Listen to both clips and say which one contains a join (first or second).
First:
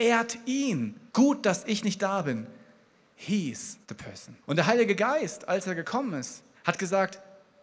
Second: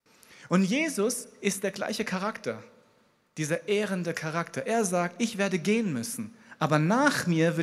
first